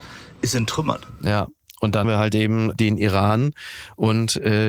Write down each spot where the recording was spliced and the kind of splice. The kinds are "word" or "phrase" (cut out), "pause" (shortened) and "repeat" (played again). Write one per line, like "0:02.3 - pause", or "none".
0:02.0 - word
0:02.7 - word

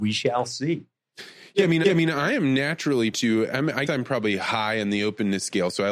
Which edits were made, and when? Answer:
0:01.8 - repeat
0:03.1 - word
0:03.9 - word

